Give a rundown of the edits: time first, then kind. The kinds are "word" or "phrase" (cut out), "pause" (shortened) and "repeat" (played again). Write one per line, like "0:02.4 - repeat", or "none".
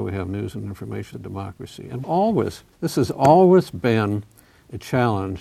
0:01.1 - phrase
0:02.0 - word
0:02.7 - pause